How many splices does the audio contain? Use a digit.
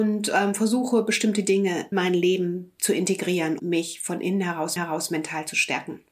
3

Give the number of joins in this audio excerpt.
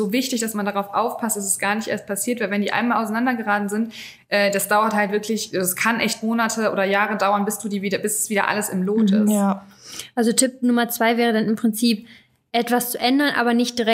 0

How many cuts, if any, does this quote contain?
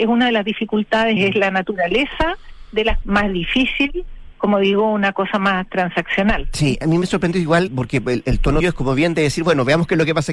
6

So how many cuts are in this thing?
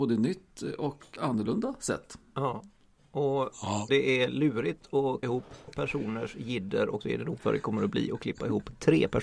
6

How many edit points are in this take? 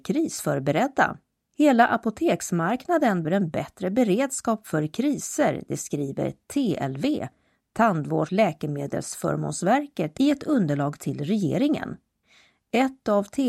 3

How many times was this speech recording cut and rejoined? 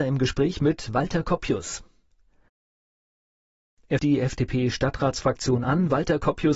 1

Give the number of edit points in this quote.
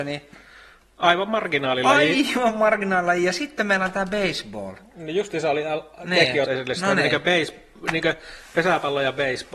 1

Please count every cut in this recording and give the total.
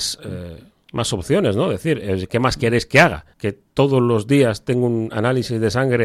1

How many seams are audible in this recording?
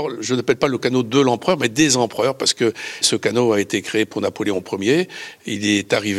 0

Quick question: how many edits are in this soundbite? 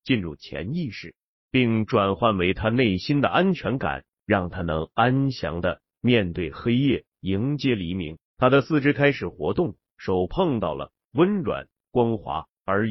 1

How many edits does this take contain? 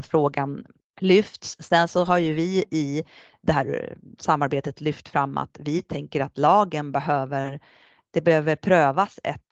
0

